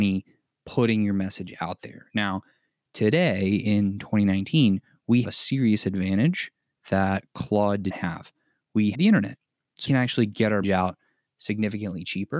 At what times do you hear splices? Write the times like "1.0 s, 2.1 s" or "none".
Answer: 5.2 s, 7.9 s, 8.9 s, 9.8 s, 10.6 s